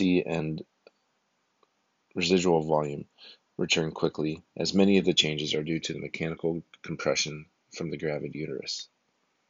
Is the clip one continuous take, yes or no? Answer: yes